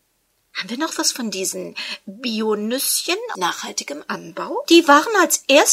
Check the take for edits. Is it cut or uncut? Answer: cut